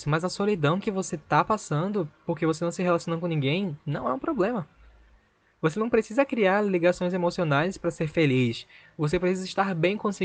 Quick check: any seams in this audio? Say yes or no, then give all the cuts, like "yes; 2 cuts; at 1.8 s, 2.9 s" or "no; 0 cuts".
no; 0 cuts